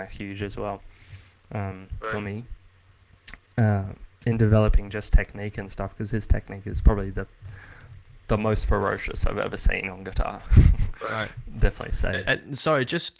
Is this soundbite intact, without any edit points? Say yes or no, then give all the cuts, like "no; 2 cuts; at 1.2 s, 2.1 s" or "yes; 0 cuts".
yes; 0 cuts